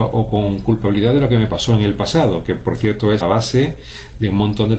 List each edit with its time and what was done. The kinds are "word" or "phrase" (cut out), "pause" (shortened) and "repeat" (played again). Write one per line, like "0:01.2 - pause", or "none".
0:03.2 - word